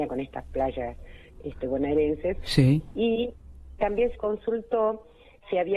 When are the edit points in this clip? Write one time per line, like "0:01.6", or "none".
0:03.8
0:04.1